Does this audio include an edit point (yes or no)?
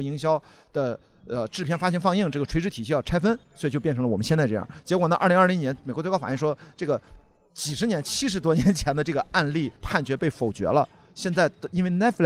yes